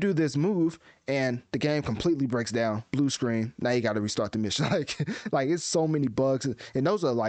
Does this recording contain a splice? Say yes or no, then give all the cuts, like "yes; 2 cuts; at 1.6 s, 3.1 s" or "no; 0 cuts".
no; 0 cuts